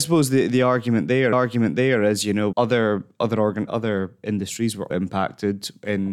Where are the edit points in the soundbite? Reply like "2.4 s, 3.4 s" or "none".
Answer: 1.3 s, 2.5 s, 3.7 s, 4.9 s